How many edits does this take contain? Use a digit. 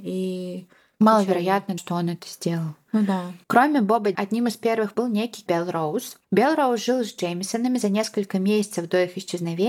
6